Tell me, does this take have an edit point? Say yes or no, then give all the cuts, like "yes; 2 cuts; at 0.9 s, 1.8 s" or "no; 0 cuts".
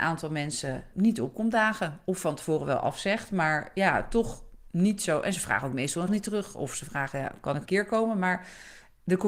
yes; 3 cuts; at 0.9 s, 6.1 s, 7.6 s